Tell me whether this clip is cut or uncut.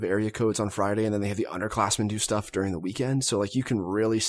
uncut